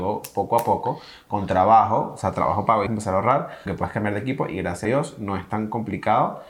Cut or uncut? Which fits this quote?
cut